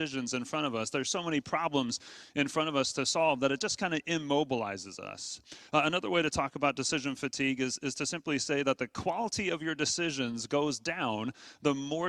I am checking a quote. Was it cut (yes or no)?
no